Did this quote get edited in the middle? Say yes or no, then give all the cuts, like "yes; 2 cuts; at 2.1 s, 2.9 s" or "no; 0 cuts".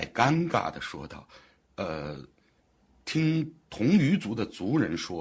no; 0 cuts